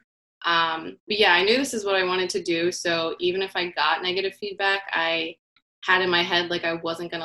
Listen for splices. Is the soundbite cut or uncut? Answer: uncut